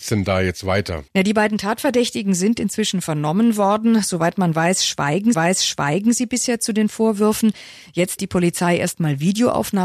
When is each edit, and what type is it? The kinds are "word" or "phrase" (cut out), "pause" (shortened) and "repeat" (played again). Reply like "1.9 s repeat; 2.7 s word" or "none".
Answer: 1.1 s pause; 5.3 s repeat; 8.2 s word

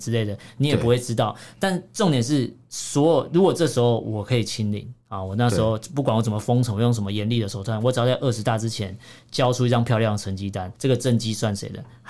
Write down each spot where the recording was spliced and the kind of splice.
5.0 s pause; 10.7 s pause

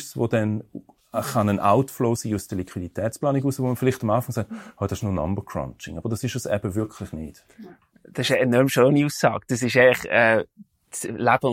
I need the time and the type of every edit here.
none

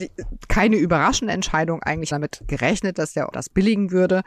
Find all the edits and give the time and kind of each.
2.1 s phrase; 3.3 s word

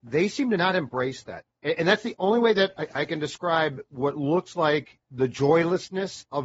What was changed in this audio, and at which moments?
5.0 s pause

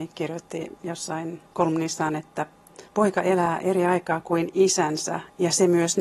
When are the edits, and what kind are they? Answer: 1.5 s pause; 2.9 s pause

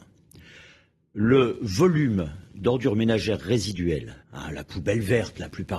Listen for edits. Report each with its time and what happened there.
4.2 s pause

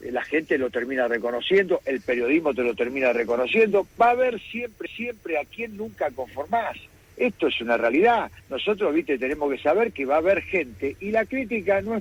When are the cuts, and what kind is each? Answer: 4.9 s repeat; 8.4 s pause

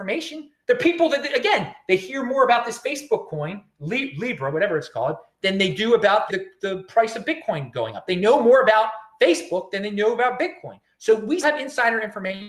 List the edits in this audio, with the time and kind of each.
6.3 s word; 11.4 s word

